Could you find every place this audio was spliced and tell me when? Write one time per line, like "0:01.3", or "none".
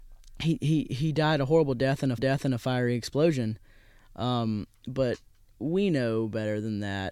0:02.2
0:04.8